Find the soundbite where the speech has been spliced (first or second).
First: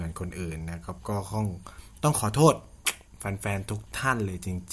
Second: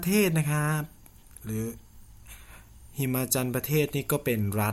first